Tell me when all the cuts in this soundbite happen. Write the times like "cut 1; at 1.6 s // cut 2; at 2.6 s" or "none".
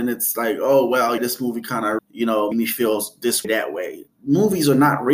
cut 1; at 1.2 s // cut 2; at 2.0 s // cut 3; at 2.5 s // cut 4; at 3.4 s // cut 5; at 4.1 s